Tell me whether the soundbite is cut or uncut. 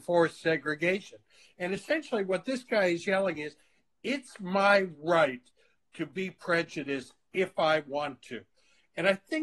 uncut